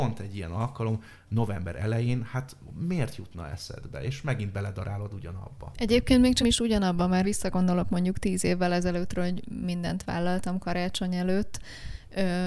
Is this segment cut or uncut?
cut